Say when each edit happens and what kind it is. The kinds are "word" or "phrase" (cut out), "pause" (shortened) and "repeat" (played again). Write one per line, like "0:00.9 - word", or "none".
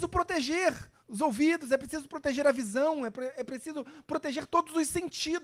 0:01.0 - pause